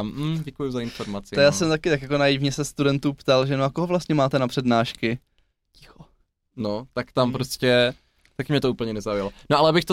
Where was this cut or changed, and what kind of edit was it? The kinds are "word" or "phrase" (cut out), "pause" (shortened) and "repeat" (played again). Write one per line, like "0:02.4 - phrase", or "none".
none

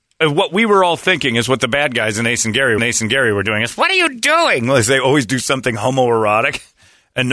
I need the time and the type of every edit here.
0:02.8 - repeat

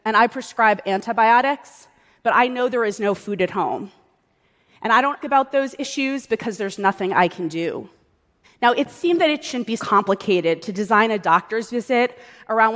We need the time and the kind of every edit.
0:05.2 - word
0:08.4 - pause
0:09.8 - word

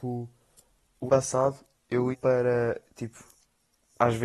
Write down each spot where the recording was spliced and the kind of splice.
0:01.1 - word
0:02.1 - word

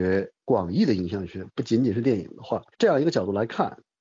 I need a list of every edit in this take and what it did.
0:02.7 - pause

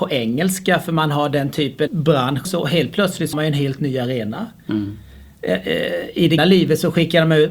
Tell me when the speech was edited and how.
0:01.9 - word
0:02.4 - word
0:03.3 - word
0:06.4 - word

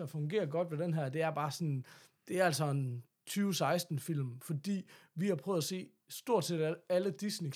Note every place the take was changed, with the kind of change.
none

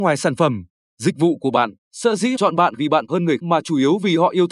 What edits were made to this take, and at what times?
0:01.8 - pause
0:02.4 - word
0:02.8 - phrase
0:03.1 - phrase
0:03.4 - word

